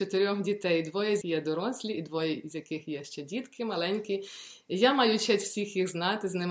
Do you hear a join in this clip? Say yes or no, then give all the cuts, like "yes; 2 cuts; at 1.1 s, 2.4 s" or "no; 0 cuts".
yes; 1 cut; at 1.2 s